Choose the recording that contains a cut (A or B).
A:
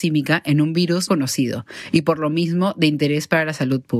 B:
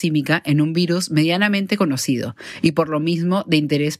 A